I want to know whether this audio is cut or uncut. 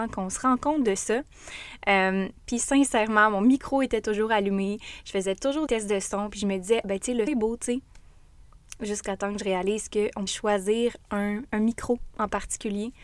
cut